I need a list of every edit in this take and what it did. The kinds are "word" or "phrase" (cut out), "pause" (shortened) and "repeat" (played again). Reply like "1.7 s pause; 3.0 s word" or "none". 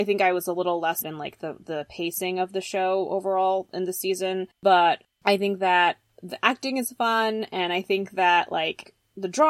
1.0 s word; 4.5 s pause